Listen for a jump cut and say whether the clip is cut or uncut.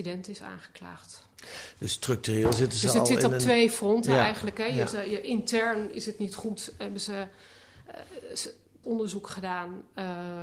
cut